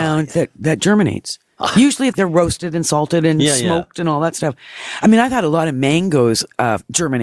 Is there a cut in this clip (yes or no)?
yes